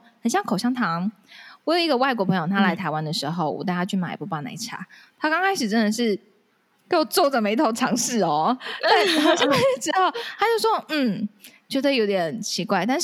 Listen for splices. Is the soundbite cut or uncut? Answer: uncut